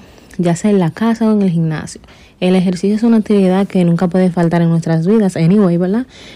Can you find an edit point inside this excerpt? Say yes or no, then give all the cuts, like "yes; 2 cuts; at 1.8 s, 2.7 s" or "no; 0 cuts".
no; 0 cuts